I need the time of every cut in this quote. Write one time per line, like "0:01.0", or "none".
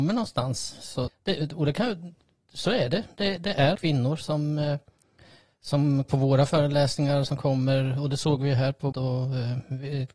0:01.1
0:03.7
0:06.0
0:08.9